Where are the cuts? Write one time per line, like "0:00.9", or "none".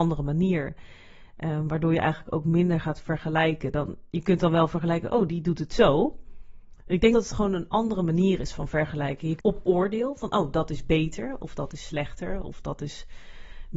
0:04.1
0:07.1
0:09.4